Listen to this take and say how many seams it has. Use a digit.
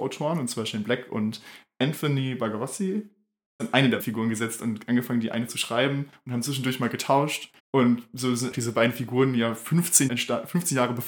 6